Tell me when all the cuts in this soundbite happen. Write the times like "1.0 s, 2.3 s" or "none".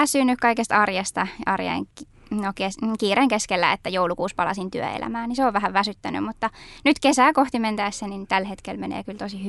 none